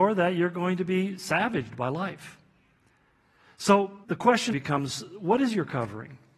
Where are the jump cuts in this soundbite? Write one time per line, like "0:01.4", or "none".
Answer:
0:04.0
0:04.5